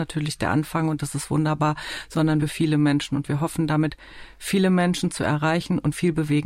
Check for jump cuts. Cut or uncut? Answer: cut